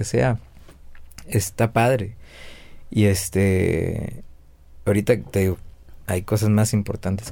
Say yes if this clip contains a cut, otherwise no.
no